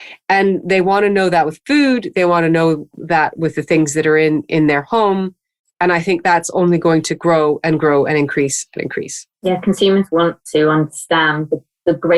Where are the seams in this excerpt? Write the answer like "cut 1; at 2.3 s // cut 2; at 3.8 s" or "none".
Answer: cut 1; at 9.3 s // cut 2; at 10.4 s